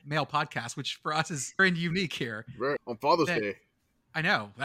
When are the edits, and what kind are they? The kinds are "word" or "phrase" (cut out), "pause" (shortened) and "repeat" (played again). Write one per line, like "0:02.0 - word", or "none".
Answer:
0:01.6 - word
0:02.8 - word